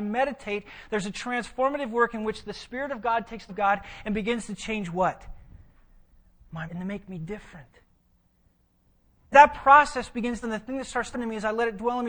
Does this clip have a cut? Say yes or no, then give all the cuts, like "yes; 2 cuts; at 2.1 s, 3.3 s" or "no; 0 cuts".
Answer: yes; 5 cuts; at 3.5 s, 6.7 s, 9.3 s, 10.4 s, 11.1 s